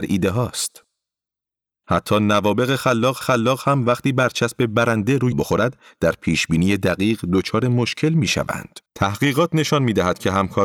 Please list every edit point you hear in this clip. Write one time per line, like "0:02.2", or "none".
0:03.2
0:05.3
0:08.9